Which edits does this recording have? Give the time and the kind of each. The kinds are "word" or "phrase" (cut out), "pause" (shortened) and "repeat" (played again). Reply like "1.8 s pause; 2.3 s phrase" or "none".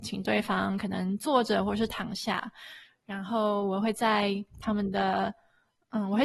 none

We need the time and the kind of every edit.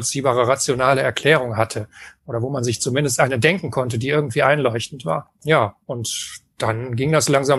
none

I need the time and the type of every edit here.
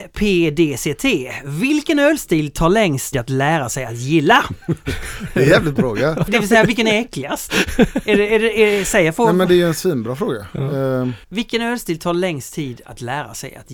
3.1 s word; 5.8 s word; 6.3 s word; 11.2 s pause

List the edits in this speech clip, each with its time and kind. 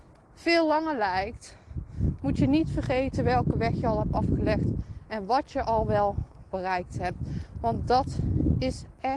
none

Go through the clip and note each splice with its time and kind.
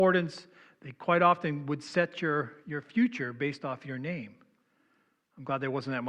none

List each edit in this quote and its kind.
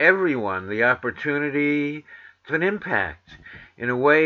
2.5 s word

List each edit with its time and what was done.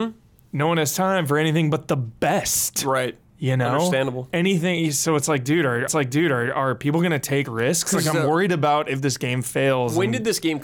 5.9 s repeat; 7.5 s word

